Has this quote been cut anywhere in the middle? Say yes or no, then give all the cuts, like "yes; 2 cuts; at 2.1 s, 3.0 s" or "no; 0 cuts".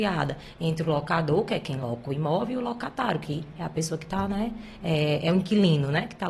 no; 0 cuts